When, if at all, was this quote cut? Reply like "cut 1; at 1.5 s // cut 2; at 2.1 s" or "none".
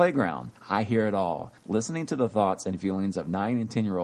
cut 1; at 1.6 s